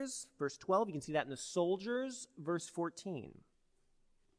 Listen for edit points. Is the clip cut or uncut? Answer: uncut